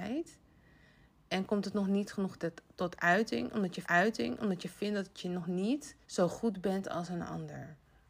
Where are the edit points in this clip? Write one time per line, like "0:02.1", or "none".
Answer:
0:03.8
0:06.0